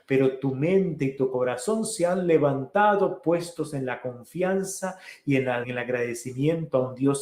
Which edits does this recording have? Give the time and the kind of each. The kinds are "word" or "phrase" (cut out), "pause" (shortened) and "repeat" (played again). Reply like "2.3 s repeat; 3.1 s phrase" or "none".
5.6 s word